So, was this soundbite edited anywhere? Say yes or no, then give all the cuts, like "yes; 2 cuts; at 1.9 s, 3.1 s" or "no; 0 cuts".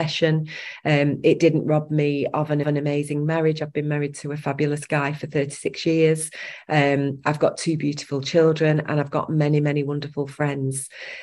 yes; 1 cut; at 2.6 s